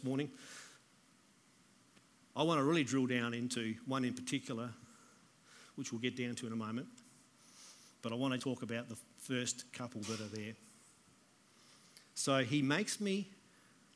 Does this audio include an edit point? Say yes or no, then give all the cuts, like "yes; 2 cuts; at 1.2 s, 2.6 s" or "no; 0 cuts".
yes; 1 cut; at 8.4 s